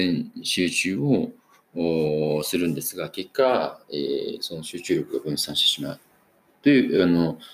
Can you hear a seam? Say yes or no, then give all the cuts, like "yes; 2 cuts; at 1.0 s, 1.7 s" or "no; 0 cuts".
no; 0 cuts